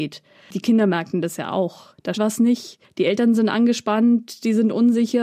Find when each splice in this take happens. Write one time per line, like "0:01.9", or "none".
0:02.1